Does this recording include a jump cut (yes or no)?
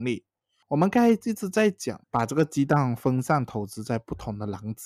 yes